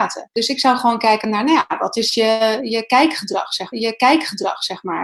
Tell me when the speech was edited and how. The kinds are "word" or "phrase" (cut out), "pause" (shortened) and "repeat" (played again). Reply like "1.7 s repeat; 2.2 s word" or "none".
3.7 s repeat